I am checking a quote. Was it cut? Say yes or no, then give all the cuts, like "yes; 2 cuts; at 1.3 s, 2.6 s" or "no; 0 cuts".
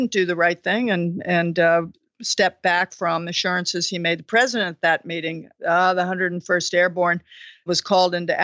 no; 0 cuts